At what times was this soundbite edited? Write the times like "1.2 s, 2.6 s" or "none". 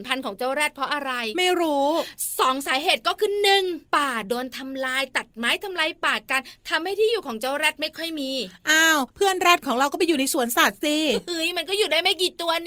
3.9 s, 9.1 s

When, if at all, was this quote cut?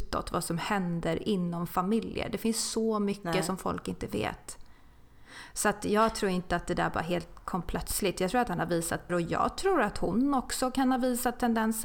9.1 s

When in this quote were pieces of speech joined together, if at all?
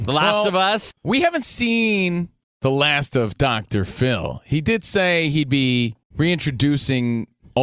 2.4 s, 6.0 s

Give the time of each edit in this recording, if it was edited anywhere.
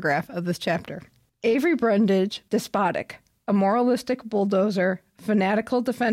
1.3 s, 2.5 s

